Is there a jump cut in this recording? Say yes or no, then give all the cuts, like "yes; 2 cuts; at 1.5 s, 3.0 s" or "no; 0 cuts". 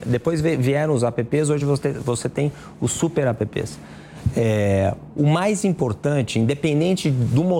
no; 0 cuts